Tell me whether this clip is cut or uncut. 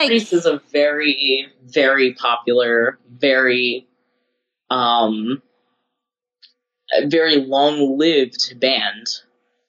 uncut